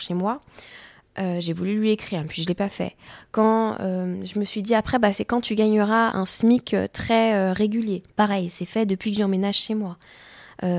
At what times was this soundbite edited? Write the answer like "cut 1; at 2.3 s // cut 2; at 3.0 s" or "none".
cut 1; at 6.1 s // cut 2; at 8.1 s